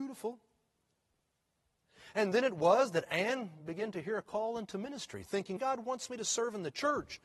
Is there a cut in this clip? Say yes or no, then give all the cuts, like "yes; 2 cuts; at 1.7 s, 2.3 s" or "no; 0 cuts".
yes; 1 cut; at 5.6 s